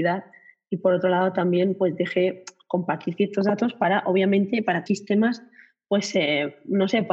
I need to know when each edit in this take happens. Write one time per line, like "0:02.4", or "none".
0:04.9